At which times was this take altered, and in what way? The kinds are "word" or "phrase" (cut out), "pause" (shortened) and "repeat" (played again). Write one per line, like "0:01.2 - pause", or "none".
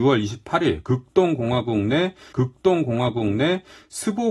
0:02.3 - repeat